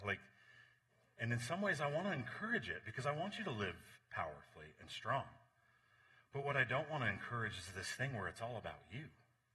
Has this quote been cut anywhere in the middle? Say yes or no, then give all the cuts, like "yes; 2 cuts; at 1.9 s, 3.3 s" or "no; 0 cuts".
no; 0 cuts